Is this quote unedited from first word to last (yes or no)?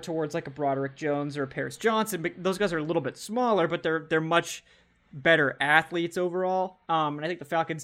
yes